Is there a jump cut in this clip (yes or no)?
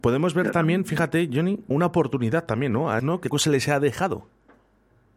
yes